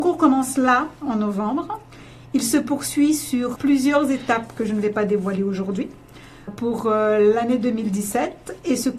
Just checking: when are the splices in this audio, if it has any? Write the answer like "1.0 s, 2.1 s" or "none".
3.6 s, 6.5 s